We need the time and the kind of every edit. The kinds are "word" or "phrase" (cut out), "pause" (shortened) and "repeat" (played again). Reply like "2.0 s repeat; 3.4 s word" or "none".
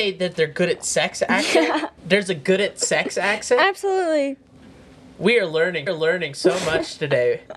2.0 s pause; 5.9 s repeat